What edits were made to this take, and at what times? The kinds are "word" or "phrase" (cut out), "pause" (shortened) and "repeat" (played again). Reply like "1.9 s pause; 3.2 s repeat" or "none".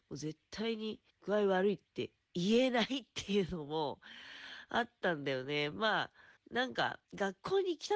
1.1 s pause; 1.9 s pause; 6.4 s pause; 7.0 s pause